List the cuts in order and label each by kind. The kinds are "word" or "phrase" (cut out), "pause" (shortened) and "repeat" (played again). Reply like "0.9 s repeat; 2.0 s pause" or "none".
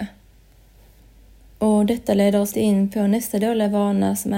2.5 s word